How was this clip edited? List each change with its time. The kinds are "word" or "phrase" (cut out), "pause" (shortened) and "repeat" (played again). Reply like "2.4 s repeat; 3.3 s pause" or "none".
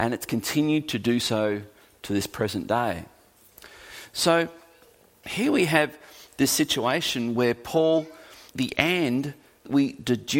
none